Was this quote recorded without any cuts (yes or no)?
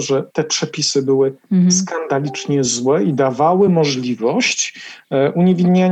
yes